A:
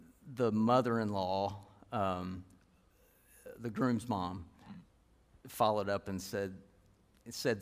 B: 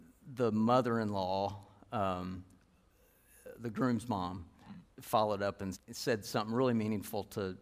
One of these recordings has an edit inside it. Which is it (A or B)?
B